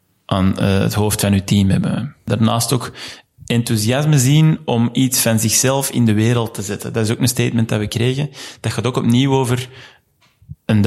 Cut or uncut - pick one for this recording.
uncut